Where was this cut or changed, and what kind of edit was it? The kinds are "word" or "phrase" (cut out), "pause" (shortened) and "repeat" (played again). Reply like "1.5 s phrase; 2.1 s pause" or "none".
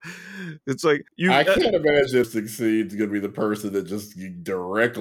1.1 s pause; 2.2 s word